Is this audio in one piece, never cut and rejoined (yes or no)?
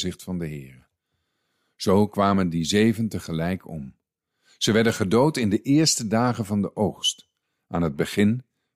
yes